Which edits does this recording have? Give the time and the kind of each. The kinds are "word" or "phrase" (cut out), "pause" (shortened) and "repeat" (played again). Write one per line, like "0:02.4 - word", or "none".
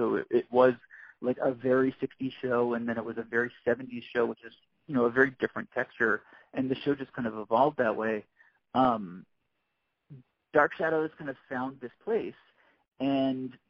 none